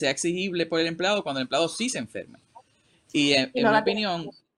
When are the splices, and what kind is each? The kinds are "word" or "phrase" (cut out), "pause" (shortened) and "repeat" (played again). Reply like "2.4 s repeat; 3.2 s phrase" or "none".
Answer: none